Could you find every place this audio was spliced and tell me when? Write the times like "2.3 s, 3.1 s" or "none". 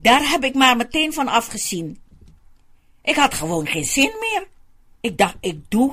none